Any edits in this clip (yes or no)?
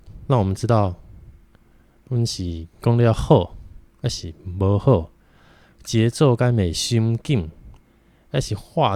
yes